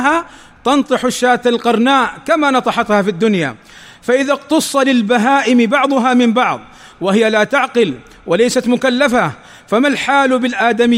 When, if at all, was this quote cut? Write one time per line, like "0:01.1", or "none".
none